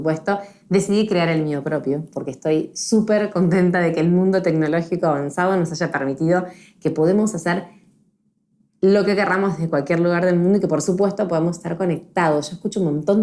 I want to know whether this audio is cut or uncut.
uncut